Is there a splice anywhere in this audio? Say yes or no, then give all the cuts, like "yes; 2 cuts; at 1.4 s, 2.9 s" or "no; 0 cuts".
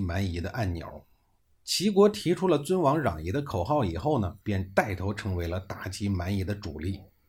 yes; 1 cut; at 4.4 s